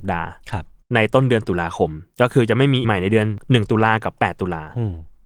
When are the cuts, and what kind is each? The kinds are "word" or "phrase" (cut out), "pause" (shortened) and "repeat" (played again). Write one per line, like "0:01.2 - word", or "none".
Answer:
0:02.8 - word